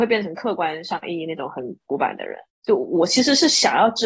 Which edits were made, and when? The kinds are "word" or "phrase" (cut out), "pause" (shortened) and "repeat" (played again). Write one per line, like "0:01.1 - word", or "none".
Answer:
0:02.5 - pause